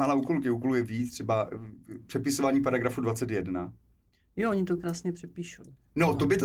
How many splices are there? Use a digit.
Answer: 0